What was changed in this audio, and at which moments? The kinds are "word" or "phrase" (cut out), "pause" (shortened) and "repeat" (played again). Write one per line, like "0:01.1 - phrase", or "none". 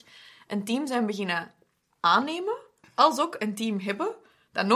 none